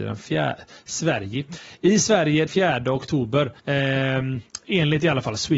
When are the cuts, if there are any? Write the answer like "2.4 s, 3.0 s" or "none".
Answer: 2.5 s, 3.6 s

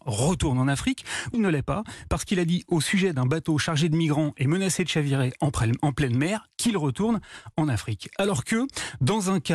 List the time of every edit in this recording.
1.3 s

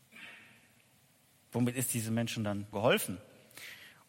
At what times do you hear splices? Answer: 2.7 s

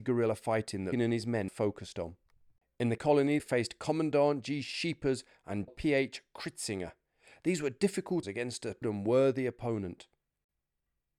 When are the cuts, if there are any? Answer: 0.9 s, 1.5 s, 3.0 s, 3.4 s, 5.7 s, 8.2 s, 8.8 s

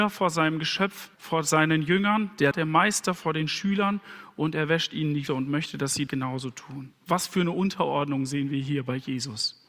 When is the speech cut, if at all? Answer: 1.1 s, 2.5 s, 5.3 s, 6.1 s

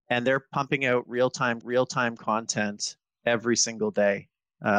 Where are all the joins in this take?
1.6 s

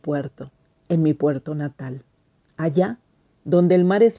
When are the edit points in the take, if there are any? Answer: none

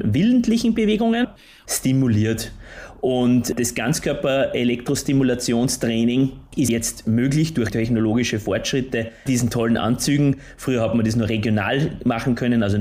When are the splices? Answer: 1.7 s, 6.7 s, 7.7 s, 9.3 s

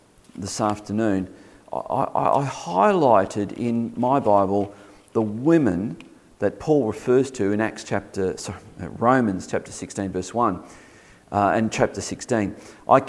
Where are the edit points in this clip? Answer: none

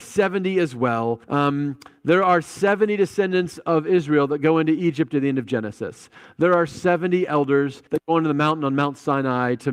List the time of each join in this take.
1.2 s, 7.9 s

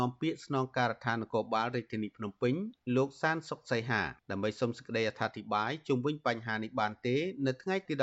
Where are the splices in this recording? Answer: 4.2 s

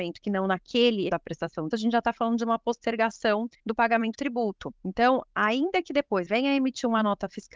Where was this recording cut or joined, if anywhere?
1.1 s, 1.7 s, 3.6 s, 4.1 s, 4.8 s, 6.2 s

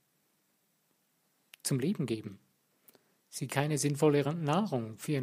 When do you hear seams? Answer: 3.5 s

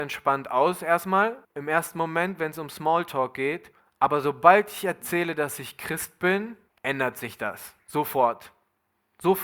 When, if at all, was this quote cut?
1.4 s, 3.8 s, 6.7 s

